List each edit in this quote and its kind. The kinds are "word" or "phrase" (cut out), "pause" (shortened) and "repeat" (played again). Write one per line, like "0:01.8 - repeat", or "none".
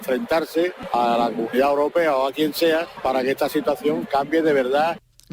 none